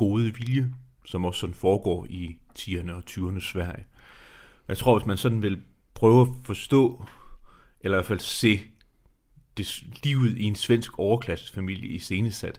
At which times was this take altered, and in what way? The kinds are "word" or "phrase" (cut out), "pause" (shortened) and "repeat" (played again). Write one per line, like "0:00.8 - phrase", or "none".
none